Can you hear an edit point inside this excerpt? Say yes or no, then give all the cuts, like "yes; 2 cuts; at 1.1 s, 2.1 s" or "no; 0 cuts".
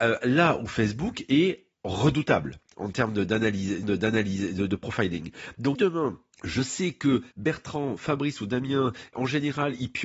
yes; 6 cuts; at 1.7 s, 3.8 s, 5.7 s, 6.3 s, 7.3 s, 9.1 s